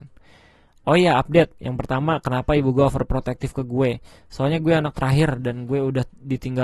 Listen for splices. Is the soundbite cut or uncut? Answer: uncut